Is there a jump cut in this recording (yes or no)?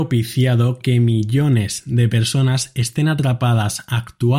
no